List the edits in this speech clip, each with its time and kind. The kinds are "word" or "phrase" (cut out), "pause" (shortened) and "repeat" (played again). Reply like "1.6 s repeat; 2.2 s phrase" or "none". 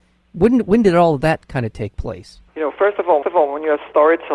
2.5 s pause; 3.2 s repeat